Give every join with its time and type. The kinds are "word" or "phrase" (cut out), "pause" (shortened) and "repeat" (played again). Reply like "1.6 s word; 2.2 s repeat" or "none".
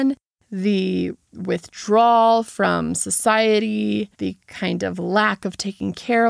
4.1 s pause